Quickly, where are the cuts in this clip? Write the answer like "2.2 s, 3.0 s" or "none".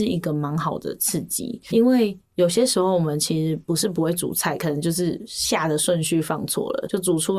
1.7 s